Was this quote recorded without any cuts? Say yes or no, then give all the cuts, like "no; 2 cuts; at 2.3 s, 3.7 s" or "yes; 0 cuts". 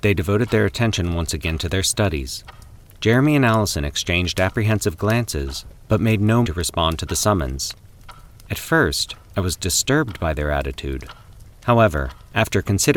no; 1 cut; at 6.4 s